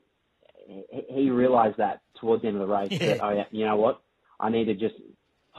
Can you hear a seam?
no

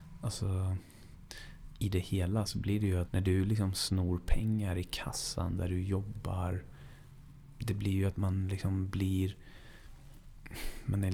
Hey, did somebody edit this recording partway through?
yes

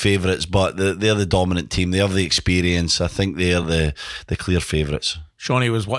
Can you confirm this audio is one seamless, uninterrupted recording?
yes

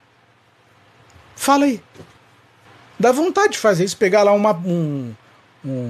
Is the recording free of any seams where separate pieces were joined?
no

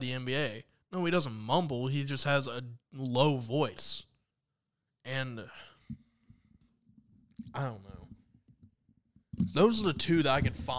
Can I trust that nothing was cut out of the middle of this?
no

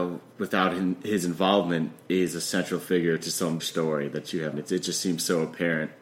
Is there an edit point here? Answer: yes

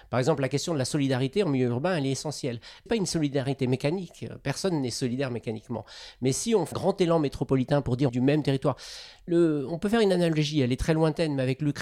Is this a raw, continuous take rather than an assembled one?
no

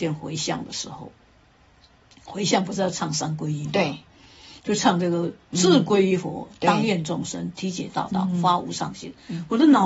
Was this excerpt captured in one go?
yes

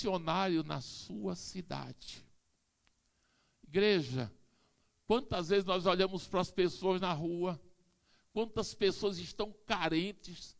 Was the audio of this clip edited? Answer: no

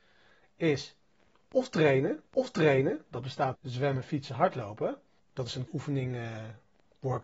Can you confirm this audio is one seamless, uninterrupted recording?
no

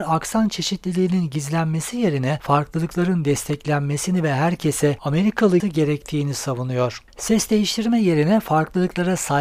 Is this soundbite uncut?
no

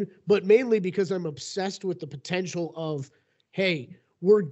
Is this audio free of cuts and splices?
yes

